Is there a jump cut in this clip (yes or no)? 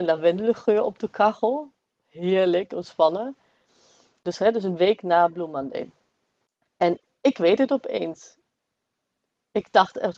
no